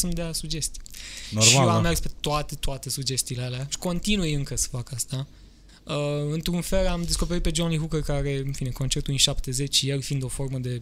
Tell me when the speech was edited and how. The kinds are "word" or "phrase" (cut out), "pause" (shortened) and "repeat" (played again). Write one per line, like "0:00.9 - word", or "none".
none